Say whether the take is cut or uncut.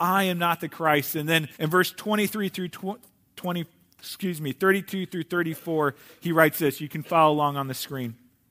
cut